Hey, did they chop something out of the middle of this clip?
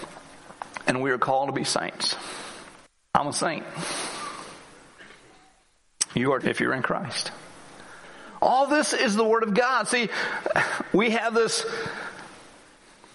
yes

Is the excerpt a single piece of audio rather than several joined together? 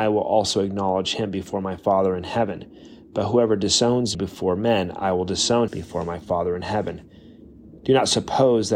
no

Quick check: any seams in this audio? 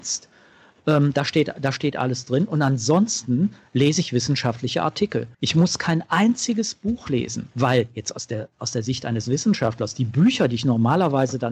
yes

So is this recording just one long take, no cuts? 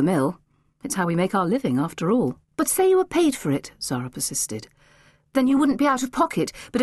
no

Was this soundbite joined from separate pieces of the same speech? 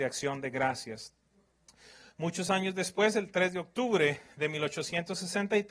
no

